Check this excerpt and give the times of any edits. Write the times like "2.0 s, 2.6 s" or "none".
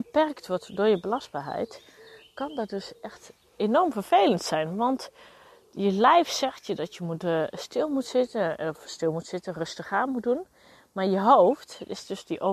none